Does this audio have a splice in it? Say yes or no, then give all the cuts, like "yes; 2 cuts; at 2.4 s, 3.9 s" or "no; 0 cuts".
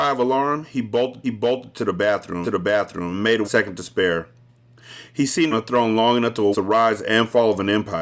yes; 5 cuts; at 1.2 s, 2.4 s, 3.4 s, 5.5 s, 6.5 s